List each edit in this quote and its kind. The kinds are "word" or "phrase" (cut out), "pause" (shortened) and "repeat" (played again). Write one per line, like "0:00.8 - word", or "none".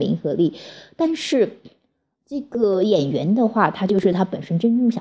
none